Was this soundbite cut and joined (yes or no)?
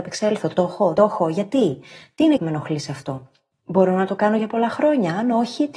yes